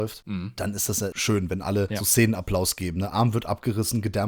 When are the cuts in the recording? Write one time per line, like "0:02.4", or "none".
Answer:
none